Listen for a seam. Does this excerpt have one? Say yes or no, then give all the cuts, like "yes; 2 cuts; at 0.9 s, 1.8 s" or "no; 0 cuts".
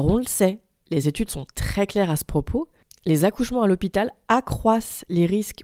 no; 0 cuts